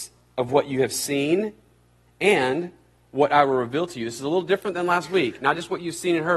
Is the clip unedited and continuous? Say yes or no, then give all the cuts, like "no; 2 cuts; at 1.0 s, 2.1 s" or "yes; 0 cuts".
yes; 0 cuts